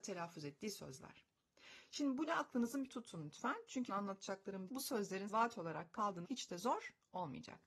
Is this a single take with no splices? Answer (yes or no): no